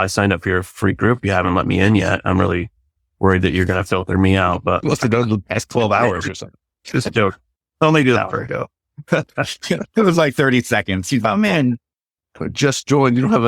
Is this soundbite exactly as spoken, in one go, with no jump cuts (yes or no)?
yes